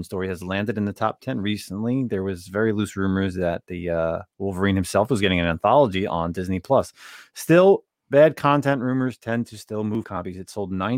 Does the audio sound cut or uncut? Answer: uncut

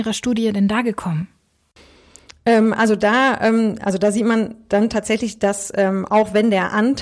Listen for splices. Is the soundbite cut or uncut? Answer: uncut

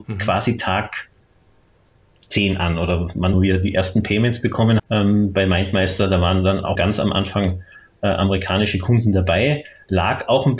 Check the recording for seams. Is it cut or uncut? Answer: cut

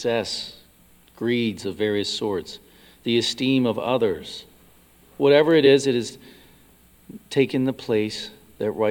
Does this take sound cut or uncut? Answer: uncut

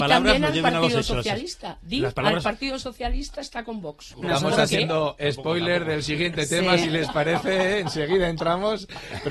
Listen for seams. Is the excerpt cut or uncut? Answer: cut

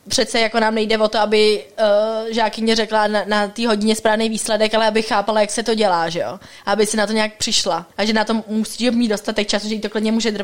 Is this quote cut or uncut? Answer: cut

